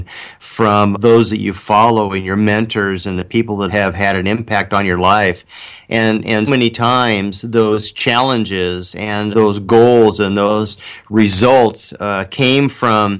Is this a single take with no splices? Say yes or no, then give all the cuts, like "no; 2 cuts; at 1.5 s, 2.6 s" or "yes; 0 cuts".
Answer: no; 4 cuts; at 0.9 s, 3.7 s, 6.5 s, 9.3 s